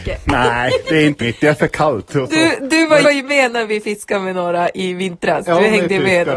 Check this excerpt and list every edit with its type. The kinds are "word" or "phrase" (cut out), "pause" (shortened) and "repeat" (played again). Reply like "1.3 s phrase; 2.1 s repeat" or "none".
1.2 s word; 3.0 s phrase